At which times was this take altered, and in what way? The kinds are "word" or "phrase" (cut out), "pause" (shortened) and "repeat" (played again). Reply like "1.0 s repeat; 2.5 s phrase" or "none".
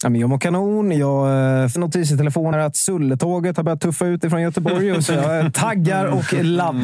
1.8 s phrase; 2.5 s word

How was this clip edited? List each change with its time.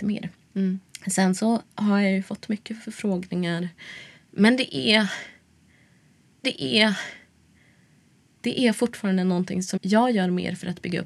1.7 s pause; 6.4 s repeat; 9.8 s word

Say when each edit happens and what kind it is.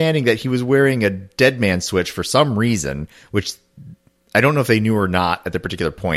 none

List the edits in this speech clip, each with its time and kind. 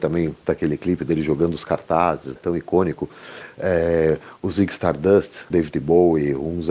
2.4 s word; 5.5 s word

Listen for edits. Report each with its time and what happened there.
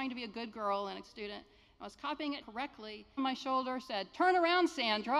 1.0 s word; 2.4 s word; 3.2 s phrase

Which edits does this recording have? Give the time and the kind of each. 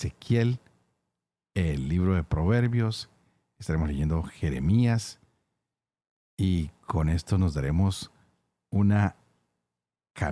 none

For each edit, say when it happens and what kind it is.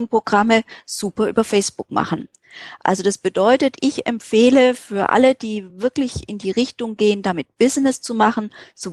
none

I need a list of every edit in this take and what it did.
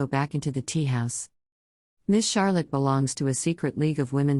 2.7 s word

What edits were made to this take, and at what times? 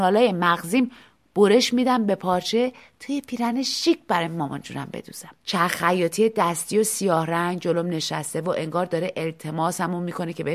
5.4 s pause

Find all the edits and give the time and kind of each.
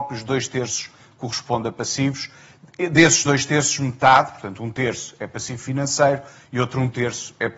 none

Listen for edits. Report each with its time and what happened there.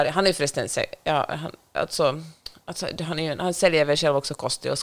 none

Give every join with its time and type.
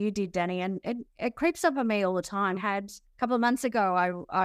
2.6 s word

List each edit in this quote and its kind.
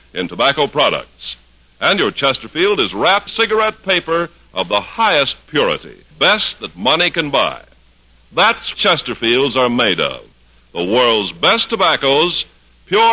3.3 s word; 6.1 s word; 8.7 s word

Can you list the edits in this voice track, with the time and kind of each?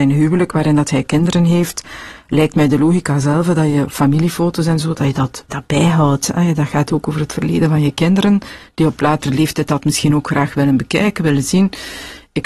5.5 s word

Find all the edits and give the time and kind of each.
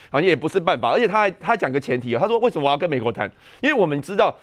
none

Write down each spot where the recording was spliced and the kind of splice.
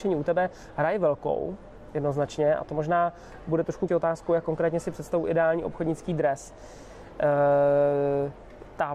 3.9 s phrase

